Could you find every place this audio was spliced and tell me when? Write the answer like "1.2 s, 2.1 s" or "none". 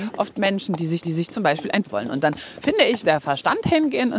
1.0 s, 1.8 s, 3.0 s